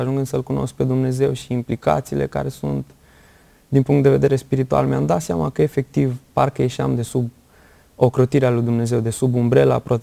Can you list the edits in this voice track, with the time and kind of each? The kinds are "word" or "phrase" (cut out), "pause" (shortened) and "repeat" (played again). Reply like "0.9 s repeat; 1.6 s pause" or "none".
none